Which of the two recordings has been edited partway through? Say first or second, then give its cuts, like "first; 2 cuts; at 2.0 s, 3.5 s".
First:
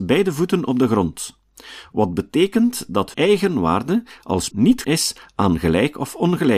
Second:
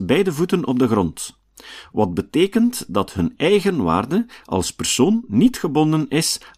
first; 3 cuts; at 3.1 s, 4.5 s, 4.8 s